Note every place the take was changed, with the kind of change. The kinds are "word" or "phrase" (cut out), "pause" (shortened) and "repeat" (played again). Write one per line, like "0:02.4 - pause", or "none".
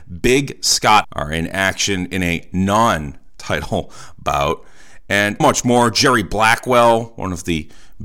0:01.0 - word
0:05.4 - word